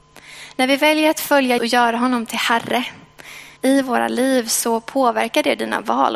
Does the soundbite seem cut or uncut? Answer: cut